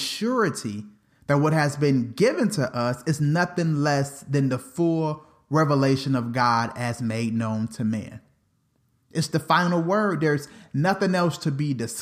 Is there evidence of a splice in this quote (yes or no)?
no